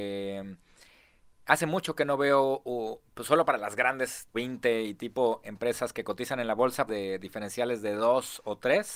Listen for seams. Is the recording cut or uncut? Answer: cut